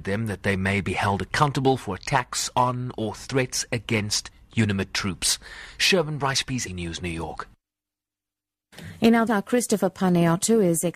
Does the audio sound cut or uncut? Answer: cut